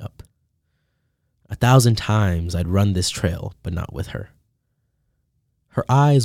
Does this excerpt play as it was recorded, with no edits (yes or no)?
yes